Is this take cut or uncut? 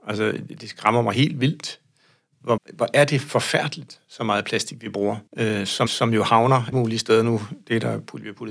cut